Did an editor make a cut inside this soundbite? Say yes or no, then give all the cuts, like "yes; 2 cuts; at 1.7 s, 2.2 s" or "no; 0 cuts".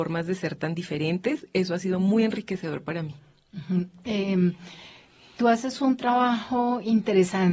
no; 0 cuts